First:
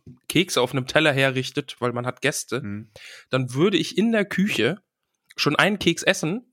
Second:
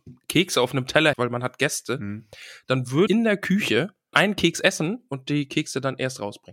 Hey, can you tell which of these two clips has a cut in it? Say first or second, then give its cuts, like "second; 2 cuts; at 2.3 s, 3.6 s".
second; 3 cuts; at 1.1 s, 3.1 s, 4.1 s